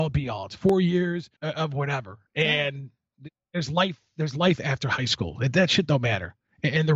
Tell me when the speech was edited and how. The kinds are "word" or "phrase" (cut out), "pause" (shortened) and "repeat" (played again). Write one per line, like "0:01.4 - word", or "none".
0:01.4 - pause